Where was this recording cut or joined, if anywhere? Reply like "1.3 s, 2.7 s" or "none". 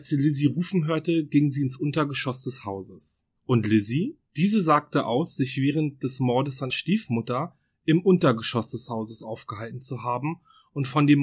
3.4 s, 4.3 s, 6.7 s